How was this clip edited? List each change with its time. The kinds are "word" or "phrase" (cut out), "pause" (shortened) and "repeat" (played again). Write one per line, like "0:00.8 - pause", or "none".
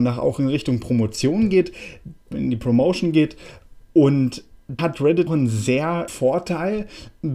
0:02.3 - word
0:04.8 - word
0:05.3 - word
0:06.1 - word